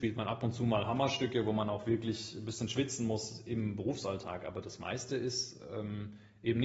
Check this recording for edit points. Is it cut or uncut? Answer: uncut